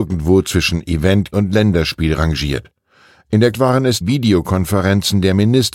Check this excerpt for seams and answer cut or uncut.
cut